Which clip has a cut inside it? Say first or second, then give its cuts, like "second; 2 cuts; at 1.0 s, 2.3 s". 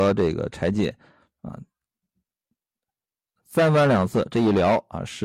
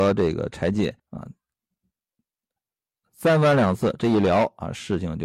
second; 1 cut; at 1.0 s